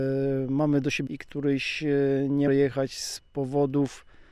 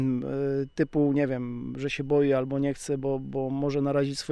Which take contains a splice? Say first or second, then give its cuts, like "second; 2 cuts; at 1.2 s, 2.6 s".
first; 2 cuts; at 1.1 s, 2.5 s